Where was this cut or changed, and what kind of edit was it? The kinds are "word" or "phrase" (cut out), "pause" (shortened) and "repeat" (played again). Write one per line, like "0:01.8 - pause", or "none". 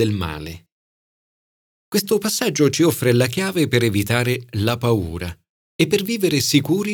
none